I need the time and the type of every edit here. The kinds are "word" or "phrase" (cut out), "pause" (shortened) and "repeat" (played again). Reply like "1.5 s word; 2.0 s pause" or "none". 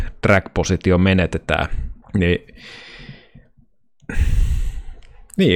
2.0 s pause